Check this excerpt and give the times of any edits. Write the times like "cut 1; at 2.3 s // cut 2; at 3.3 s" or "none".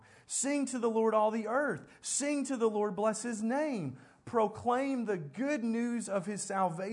none